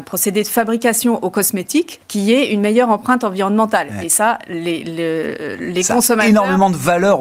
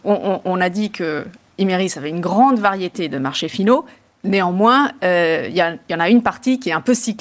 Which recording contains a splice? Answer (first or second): first